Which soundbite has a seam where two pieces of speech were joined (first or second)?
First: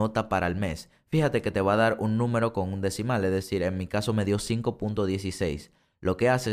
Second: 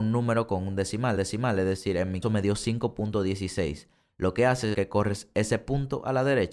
second